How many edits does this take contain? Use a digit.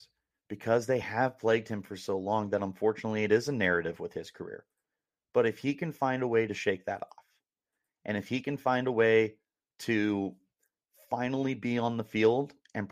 0